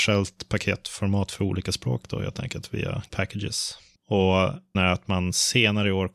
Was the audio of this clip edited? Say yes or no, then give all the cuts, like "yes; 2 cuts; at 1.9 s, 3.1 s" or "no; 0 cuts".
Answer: yes; 2 cuts; at 3.1 s, 4.7 s